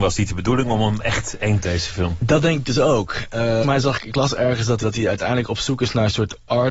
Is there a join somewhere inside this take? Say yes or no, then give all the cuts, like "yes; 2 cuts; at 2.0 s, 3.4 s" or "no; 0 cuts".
yes; 3 cuts; at 1.6 s, 3.6 s, 4.8 s